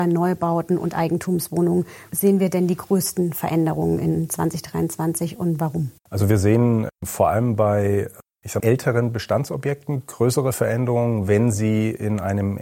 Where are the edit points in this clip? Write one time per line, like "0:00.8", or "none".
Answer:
0:02.1
0:06.0
0:06.9
0:08.6